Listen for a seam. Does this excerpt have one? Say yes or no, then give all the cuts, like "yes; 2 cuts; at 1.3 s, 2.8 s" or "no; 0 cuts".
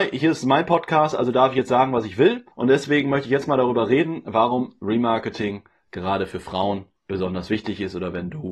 yes; 2 cuts; at 2.5 s, 7.0 s